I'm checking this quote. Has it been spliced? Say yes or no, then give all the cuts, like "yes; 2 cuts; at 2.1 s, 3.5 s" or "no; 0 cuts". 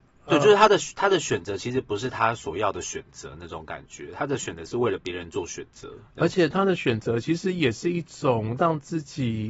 no; 0 cuts